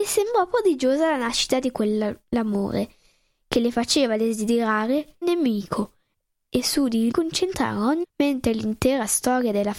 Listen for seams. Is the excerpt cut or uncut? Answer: cut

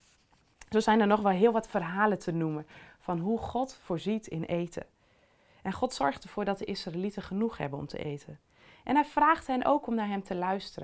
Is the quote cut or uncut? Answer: uncut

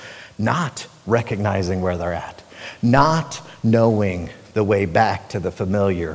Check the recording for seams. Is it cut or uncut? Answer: uncut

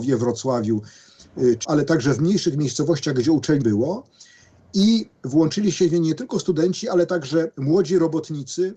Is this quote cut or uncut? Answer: cut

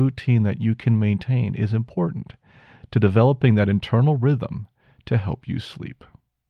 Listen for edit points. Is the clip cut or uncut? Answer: uncut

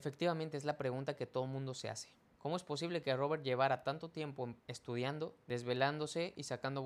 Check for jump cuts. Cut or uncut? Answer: cut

